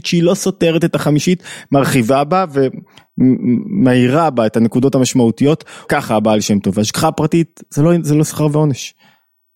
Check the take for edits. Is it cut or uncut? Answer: cut